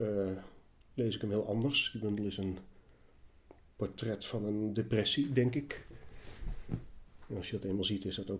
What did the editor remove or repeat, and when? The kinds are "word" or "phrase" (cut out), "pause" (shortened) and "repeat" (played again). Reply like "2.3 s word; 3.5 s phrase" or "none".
none